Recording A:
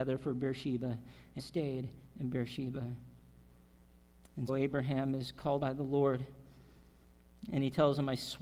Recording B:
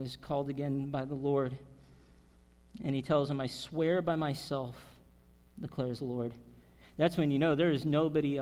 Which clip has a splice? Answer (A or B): A